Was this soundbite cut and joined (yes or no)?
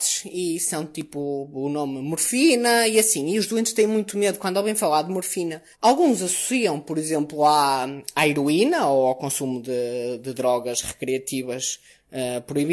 yes